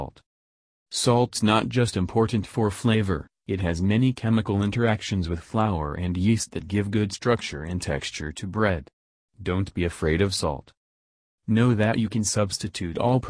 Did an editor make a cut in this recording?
no; 0 cuts

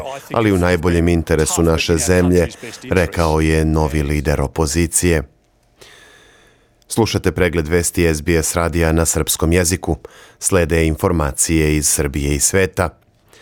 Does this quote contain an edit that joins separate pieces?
no; 0 cuts

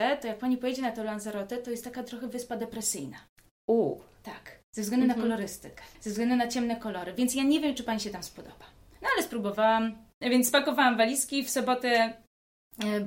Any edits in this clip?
no; 0 cuts

